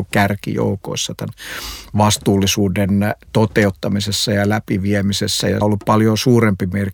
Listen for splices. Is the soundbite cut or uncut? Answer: cut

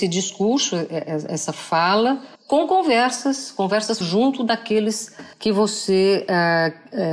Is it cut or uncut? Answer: cut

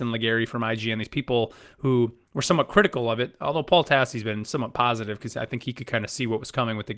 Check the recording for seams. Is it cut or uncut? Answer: uncut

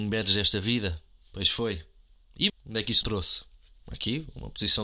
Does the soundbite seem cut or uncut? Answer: cut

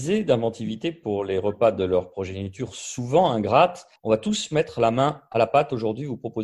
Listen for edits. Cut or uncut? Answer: cut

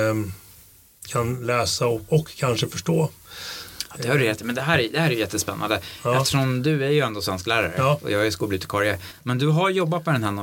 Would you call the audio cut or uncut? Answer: uncut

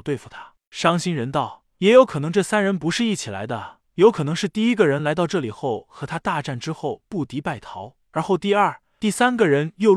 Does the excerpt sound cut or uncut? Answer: uncut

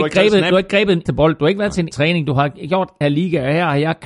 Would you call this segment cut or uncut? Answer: cut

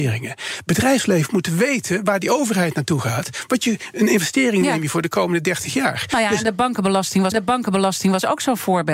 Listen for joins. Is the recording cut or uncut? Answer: cut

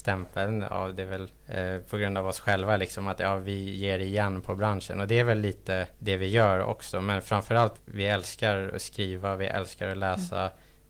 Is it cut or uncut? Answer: cut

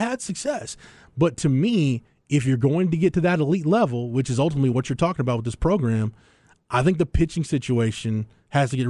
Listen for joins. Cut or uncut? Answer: uncut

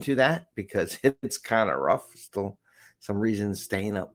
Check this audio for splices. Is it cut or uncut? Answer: uncut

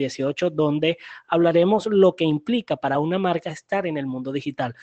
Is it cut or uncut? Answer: uncut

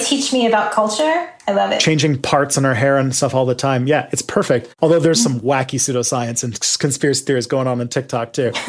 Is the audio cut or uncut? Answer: uncut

